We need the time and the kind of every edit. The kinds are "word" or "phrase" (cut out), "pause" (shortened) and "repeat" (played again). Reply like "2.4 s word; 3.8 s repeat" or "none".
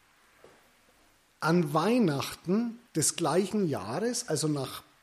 2.9 s pause